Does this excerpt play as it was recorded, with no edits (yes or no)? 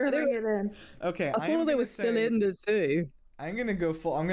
yes